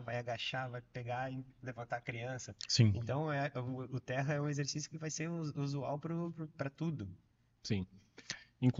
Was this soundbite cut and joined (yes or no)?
no